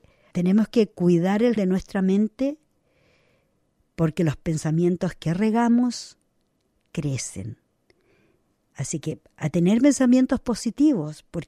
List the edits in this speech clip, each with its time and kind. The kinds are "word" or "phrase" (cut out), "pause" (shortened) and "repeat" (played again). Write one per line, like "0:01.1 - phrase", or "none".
0:01.6 - word